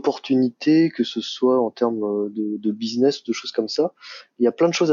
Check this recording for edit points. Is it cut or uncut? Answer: uncut